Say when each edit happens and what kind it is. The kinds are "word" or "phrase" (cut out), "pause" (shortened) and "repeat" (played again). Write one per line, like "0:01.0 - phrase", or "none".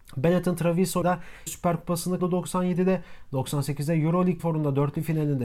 0:01.0 - word
0:01.5 - word
0:02.2 - word
0:04.4 - word